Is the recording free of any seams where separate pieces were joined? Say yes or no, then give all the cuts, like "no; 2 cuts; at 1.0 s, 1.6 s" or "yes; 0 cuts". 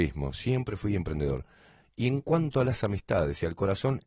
yes; 0 cuts